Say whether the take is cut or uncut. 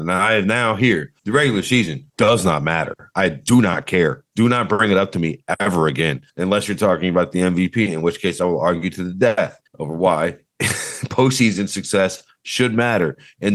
cut